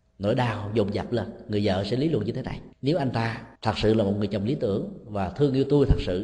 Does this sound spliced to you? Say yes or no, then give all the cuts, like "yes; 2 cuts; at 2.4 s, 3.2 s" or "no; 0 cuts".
yes; 2 cuts; at 2.7 s, 3.6 s